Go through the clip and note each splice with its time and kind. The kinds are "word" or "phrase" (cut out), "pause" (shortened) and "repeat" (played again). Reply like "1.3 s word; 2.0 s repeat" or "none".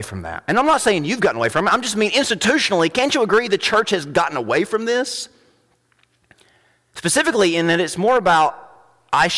none